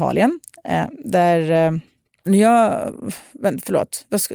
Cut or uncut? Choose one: cut